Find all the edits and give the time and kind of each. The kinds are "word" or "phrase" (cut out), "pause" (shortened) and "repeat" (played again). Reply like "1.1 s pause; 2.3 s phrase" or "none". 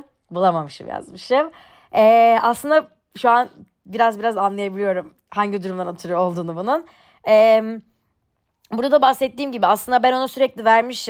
none